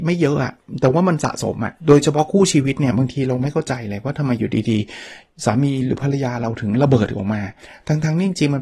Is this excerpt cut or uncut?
cut